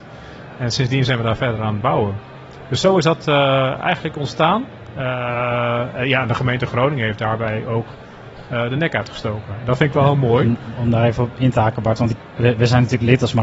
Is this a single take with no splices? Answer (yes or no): yes